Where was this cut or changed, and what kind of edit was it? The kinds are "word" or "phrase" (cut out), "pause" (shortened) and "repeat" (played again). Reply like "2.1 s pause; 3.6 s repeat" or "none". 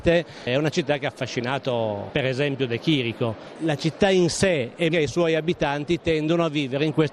4.9 s word